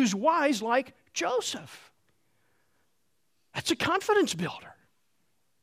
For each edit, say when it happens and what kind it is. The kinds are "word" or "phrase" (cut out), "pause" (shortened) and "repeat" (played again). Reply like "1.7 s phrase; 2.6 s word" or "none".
none